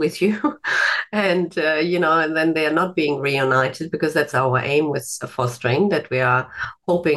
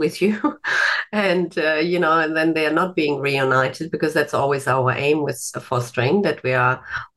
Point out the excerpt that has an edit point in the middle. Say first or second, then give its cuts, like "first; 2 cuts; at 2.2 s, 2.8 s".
first; 1 cut; at 4.3 s